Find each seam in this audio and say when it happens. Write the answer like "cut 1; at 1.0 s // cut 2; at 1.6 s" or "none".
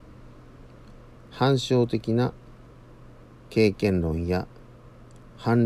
none